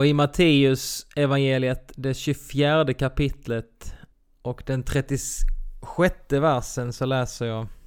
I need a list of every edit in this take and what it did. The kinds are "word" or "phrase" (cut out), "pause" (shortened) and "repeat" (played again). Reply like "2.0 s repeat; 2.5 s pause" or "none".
4.1 s pause